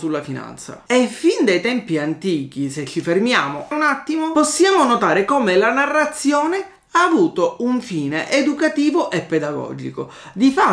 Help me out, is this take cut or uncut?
cut